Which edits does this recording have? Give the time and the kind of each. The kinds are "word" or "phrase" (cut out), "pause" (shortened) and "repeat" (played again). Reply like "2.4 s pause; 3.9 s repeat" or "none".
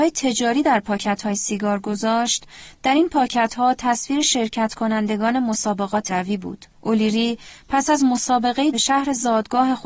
6.1 s word; 6.7 s pause; 8.7 s phrase